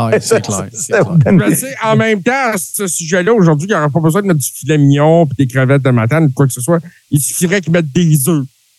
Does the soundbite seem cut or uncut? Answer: uncut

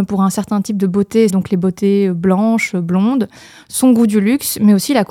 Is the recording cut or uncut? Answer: cut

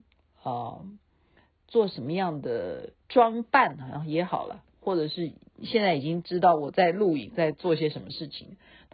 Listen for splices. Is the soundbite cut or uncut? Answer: cut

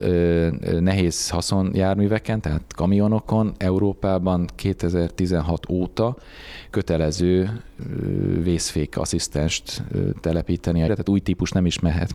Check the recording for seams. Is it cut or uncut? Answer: cut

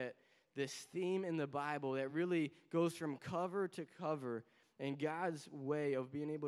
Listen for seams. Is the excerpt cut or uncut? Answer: uncut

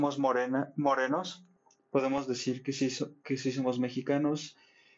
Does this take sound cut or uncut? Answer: uncut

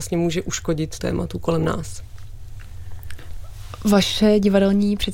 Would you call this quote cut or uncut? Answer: cut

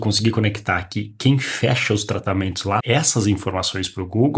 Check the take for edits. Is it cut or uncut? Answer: cut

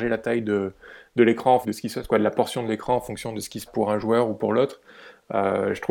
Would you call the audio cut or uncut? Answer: cut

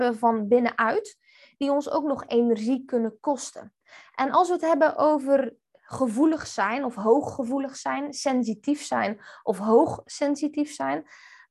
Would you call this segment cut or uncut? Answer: uncut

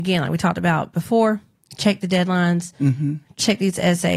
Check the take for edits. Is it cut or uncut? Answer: uncut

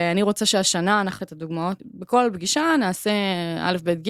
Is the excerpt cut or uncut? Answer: cut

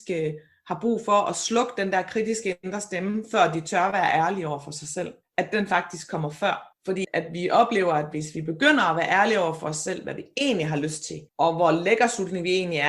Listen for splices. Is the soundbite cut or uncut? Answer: cut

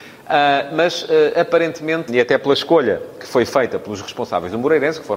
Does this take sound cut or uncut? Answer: cut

